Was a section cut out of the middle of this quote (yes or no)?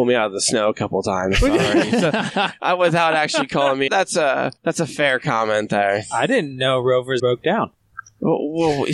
yes